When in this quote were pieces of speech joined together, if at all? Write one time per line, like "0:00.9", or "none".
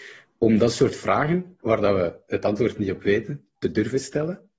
none